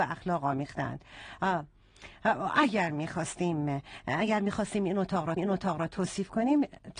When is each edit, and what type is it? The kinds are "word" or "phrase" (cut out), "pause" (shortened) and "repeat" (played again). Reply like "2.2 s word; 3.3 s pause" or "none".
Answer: 5.4 s repeat

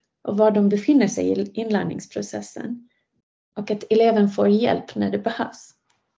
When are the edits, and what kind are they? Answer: none

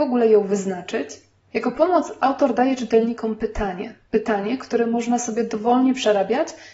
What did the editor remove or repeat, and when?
4.1 s pause

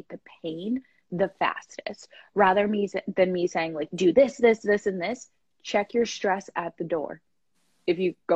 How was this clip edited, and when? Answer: none

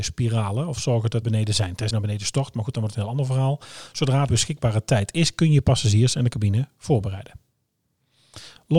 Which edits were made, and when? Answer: 1.2 s word; 1.9 s word; 4.3 s word

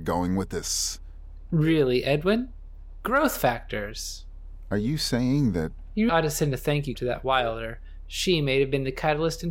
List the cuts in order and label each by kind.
6.1 s word; 6.9 s word

